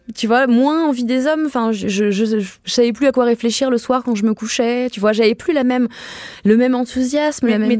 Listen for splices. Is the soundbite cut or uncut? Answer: uncut